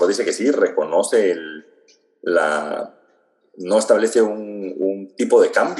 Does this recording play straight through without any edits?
yes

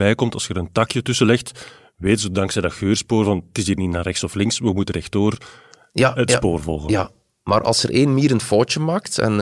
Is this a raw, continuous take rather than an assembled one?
yes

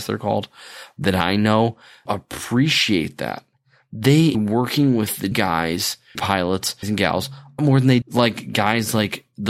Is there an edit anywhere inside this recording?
yes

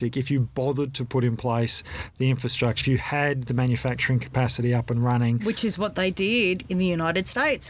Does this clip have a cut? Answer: yes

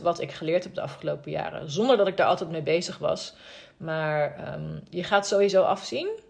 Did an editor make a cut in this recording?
no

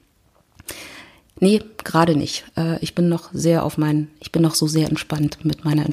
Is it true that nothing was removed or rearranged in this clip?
yes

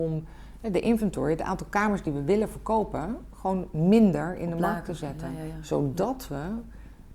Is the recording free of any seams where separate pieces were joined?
yes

